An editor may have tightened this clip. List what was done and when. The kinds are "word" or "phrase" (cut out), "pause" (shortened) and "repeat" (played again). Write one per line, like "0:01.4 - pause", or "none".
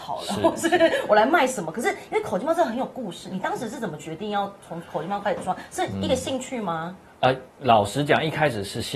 0:07.5 - pause